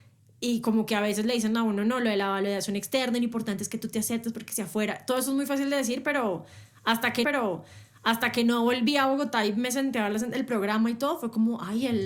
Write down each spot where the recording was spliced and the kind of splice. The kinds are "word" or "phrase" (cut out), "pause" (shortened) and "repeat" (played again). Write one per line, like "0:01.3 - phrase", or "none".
0:07.2 - repeat